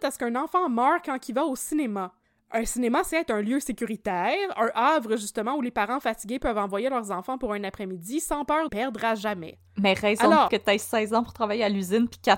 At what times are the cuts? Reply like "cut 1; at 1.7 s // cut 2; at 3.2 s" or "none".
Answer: cut 1; at 2.2 s // cut 2; at 3.1 s // cut 3; at 8.7 s // cut 4; at 10.5 s